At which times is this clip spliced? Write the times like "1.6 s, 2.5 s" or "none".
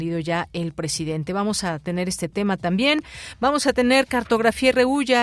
none